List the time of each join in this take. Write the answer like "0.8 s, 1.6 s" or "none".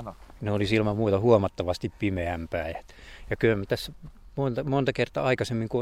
none